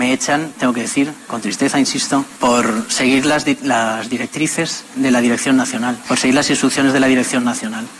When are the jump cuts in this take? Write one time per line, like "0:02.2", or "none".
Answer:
none